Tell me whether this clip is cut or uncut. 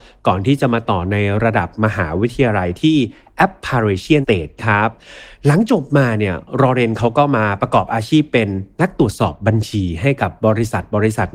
cut